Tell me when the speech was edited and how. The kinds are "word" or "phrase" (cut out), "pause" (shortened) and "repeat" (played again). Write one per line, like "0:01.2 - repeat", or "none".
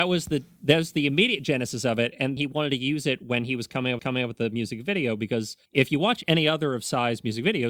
0:02.4 - word
0:04.0 - repeat
0:05.6 - pause